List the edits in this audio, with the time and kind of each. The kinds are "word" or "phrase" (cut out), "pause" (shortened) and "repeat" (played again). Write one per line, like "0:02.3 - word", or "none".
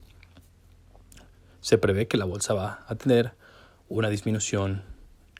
none